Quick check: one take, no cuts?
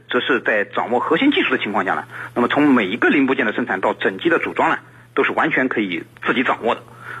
yes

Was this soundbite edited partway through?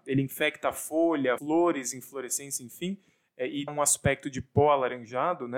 yes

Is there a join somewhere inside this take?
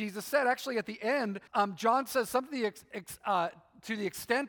yes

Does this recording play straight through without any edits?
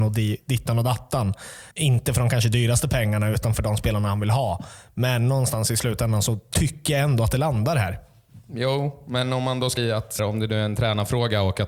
no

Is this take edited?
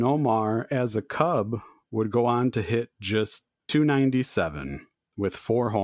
no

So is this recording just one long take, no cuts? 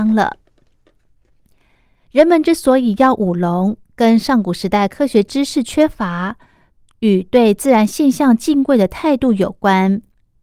yes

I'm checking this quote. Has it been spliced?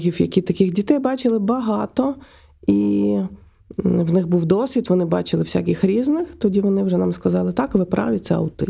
no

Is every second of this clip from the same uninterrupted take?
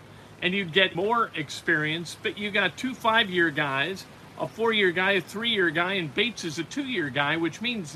no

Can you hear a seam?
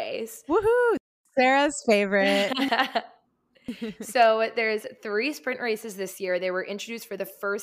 no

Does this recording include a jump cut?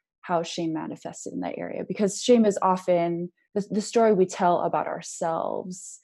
no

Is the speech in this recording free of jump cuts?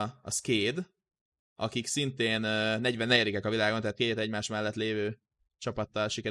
yes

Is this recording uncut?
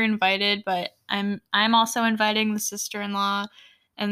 yes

